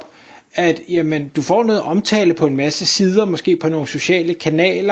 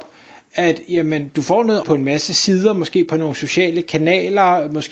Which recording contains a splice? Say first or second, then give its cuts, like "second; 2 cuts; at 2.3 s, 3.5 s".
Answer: second; 1 cut; at 1.8 s